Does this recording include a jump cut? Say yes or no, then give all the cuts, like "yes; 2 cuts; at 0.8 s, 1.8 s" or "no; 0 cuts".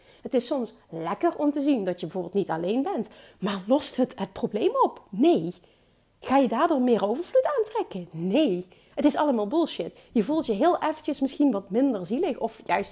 no; 0 cuts